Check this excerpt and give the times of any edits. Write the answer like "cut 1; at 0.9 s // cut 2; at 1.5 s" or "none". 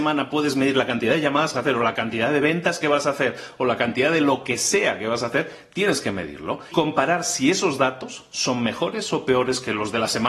cut 1; at 1.5 s // cut 2; at 6.7 s